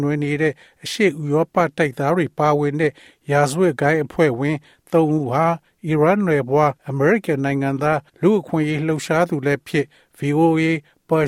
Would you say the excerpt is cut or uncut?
cut